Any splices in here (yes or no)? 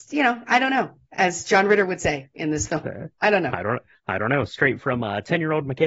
no